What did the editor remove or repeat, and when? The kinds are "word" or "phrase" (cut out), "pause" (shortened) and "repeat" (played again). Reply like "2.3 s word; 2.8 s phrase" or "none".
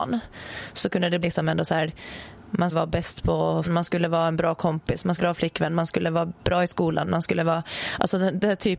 1.2 s word; 2.7 s word; 3.6 s word; 5.2 s phrase